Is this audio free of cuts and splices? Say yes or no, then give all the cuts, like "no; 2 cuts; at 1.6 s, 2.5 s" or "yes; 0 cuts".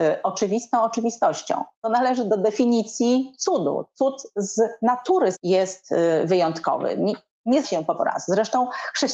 no; 4 cuts; at 1.7 s, 5.3 s, 7.6 s, 8.0 s